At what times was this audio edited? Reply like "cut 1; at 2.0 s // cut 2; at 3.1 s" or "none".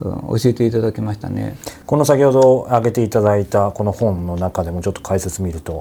cut 1; at 1.8 s